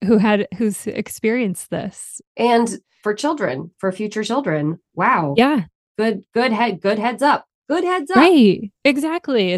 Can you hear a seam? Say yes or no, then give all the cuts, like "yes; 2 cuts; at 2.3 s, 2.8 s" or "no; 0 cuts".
no; 0 cuts